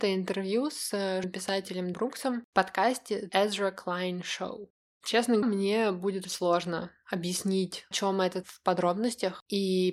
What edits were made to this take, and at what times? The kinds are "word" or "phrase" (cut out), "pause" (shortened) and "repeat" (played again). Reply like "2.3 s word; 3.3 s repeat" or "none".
1.2 s word; 1.9 s word; 3.3 s word; 5.4 s word; 6.2 s word; 7.9 s word; 8.4 s word